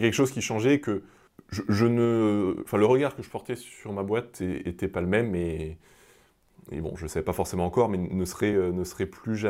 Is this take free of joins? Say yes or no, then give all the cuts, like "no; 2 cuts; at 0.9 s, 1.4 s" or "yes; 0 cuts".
yes; 0 cuts